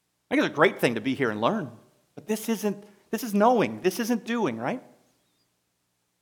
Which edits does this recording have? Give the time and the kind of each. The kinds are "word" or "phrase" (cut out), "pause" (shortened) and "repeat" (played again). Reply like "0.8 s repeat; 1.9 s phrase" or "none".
none